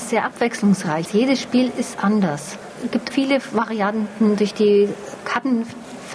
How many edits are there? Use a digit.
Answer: 1